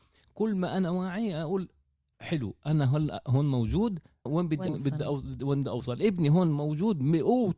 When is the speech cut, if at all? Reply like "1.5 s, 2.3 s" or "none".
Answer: 4.3 s, 4.7 s